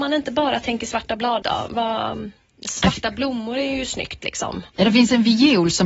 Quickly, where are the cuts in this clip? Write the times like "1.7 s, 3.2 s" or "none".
1.4 s